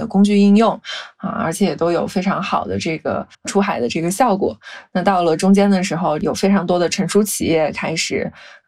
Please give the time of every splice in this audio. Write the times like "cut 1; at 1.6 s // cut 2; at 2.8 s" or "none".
cut 1; at 3.3 s